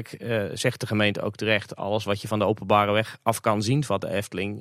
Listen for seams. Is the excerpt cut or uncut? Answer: uncut